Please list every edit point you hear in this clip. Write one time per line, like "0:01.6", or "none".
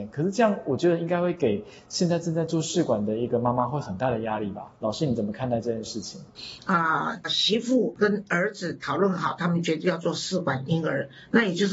0:04.8
0:07.2